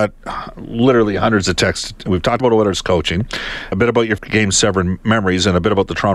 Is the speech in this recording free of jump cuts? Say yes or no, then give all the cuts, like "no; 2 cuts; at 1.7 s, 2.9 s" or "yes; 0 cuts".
no; 3 cuts; at 2.4 s, 3.7 s, 4.2 s